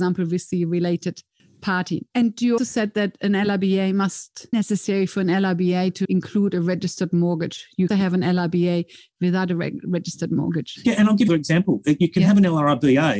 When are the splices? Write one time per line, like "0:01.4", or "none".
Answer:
0:02.1
0:02.6
0:04.5
0:06.0
0:07.9
0:11.3